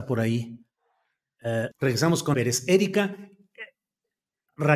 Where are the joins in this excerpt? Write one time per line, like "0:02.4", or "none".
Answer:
0:01.7
0:02.3